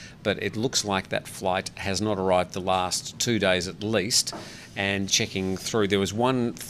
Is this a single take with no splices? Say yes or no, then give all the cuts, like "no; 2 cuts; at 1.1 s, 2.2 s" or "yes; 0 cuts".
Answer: no; 1 cut; at 5.1 s